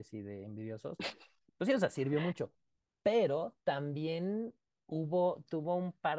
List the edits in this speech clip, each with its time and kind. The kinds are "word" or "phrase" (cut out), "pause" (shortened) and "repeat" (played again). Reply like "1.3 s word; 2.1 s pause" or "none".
none